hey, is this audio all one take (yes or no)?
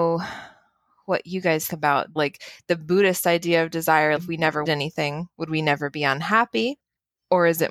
no